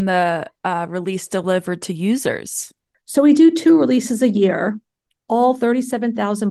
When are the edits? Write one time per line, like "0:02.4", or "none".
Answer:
none